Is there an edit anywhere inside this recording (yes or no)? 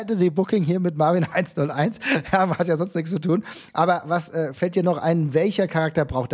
no